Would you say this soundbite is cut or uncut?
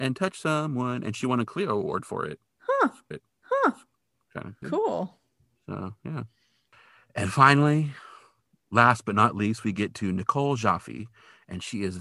cut